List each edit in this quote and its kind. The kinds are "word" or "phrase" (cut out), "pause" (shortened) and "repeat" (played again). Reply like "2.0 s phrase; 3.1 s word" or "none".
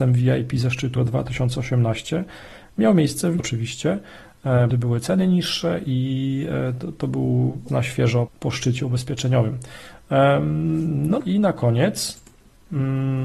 1.0 s word; 3.4 s word; 4.7 s word; 7.7 s word; 8.3 s word; 11.2 s word